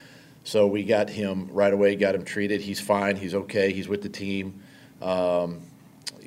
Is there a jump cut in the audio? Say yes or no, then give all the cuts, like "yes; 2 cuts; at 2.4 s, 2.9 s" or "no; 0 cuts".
no; 0 cuts